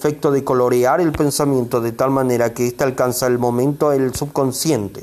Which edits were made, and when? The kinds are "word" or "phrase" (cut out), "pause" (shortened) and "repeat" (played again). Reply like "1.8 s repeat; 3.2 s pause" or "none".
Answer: none